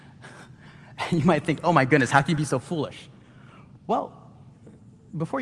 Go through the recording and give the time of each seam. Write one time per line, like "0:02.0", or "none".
none